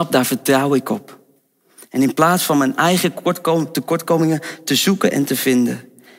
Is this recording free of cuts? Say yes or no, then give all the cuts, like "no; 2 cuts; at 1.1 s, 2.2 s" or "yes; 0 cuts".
yes; 0 cuts